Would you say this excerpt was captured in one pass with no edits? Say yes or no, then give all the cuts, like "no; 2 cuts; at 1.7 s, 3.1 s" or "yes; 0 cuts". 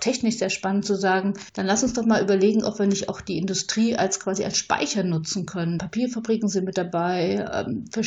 no; 1 cut; at 1.5 s